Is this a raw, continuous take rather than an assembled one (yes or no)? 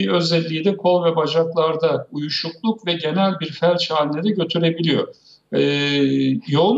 yes